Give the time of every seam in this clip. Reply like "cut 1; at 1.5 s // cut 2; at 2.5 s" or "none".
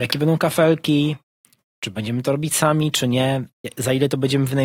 none